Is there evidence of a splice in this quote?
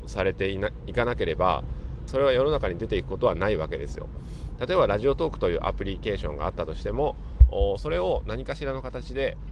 yes; 1 cut; at 2.1 s

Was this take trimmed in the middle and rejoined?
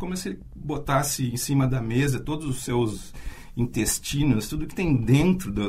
no; 0 cuts

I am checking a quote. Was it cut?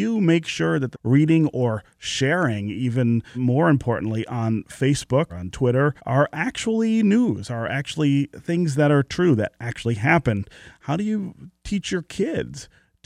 yes; 4 cuts; at 0.9 s, 3.3 s, 5.3 s, 6.0 s

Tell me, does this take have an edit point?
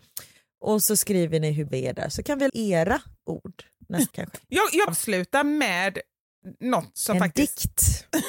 yes; 4 cuts; at 1.7 s, 2.5 s, 4.1 s, 4.9 s

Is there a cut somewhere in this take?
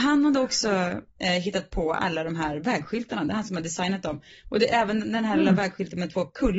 no; 0 cuts

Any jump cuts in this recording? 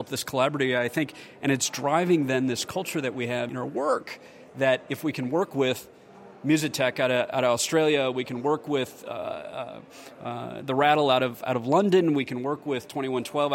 no; 0 cuts

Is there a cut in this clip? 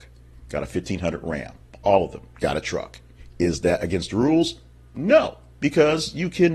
no; 0 cuts

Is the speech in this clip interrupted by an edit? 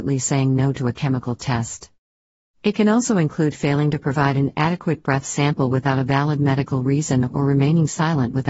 no; 0 cuts

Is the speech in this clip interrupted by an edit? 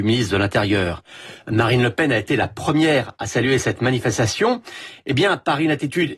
no; 0 cuts

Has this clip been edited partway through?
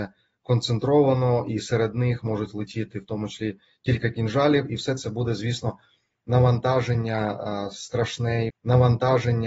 yes; 1 cut; at 8.5 s

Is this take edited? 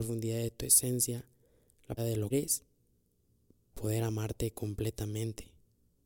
yes; 3 cuts; at 2.0 s, 2.3 s, 3.7 s

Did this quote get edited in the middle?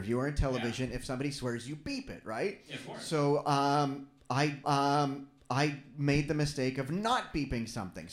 yes; 1 cut; at 4.6 s

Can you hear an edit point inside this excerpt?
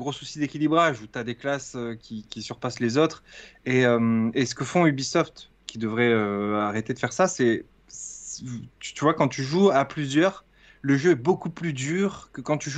yes; 1 cut; at 2.2 s

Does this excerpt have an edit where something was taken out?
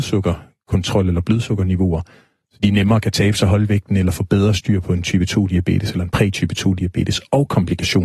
no; 0 cuts

